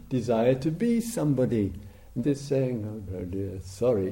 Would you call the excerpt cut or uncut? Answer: cut